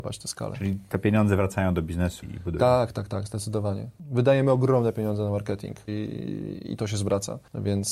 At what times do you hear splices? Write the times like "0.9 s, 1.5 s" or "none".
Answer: 2.2 s, 5.9 s